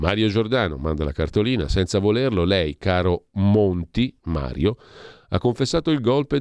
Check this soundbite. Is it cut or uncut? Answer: uncut